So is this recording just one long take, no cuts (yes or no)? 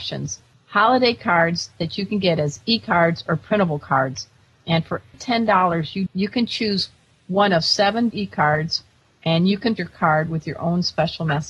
no